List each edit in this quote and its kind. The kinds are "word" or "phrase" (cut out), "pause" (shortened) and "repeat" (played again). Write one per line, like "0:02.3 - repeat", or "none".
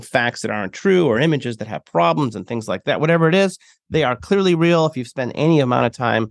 none